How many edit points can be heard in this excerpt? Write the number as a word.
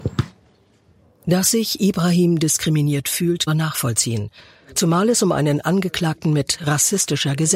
one